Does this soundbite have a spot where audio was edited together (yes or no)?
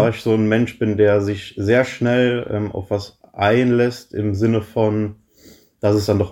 no